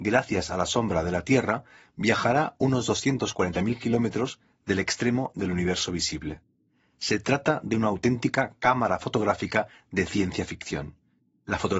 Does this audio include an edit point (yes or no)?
no